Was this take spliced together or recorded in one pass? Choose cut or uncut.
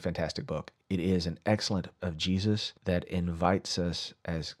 cut